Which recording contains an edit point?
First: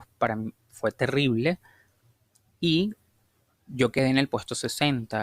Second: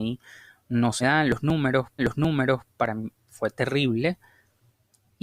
second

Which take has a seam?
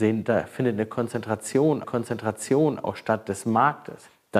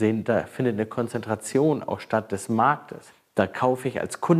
first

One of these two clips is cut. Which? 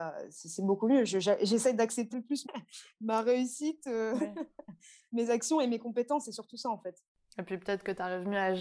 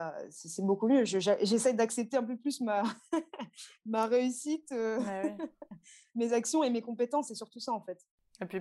first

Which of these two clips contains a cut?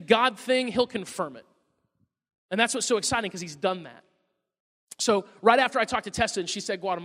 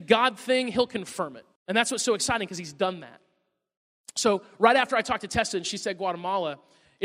second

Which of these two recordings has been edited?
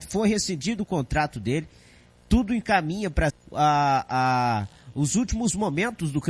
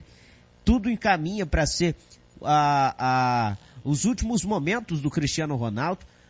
first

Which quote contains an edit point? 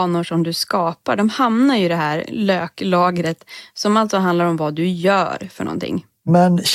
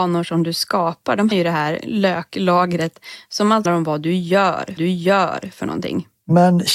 second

